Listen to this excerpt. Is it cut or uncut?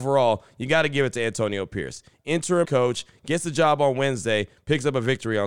cut